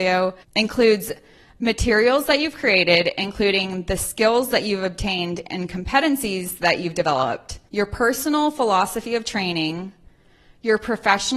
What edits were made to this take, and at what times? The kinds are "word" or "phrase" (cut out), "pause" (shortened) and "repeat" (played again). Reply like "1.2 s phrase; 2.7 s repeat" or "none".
7.7 s pause